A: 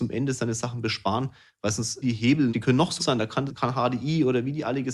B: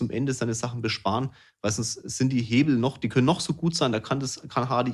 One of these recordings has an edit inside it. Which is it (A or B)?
A